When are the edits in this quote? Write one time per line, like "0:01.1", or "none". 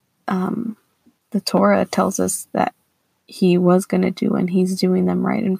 none